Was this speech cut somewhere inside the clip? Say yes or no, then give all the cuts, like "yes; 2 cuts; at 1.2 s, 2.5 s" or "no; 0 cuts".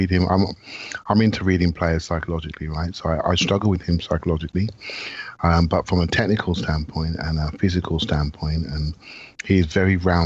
no; 0 cuts